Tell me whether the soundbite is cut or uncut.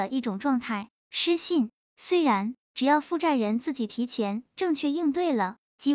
cut